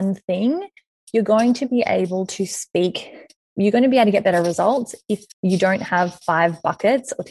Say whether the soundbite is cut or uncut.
cut